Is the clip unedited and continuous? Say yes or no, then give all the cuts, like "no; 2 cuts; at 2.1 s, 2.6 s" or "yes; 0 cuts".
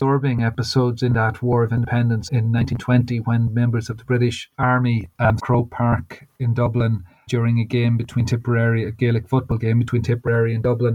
no; 4 cuts; at 2.3 s, 4.5 s, 5.4 s, 7.3 s